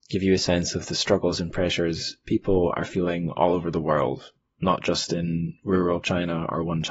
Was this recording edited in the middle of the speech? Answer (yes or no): no